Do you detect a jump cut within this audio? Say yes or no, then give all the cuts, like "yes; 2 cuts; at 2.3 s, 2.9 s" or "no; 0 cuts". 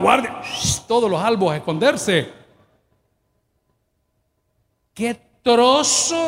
no; 0 cuts